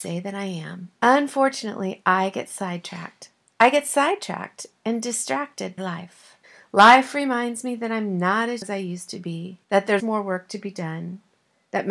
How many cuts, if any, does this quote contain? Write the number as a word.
six